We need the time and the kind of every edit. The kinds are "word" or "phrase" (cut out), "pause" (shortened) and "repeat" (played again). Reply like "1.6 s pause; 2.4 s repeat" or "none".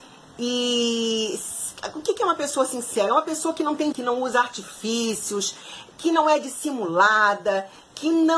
3.9 s word